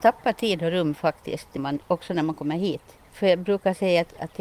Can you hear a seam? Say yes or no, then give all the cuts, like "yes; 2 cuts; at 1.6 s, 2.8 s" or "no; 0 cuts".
yes; 2 cuts; at 1.6 s, 3.1 s